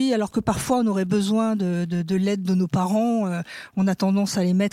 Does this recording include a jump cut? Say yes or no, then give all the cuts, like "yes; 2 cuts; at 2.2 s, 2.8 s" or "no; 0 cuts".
no; 0 cuts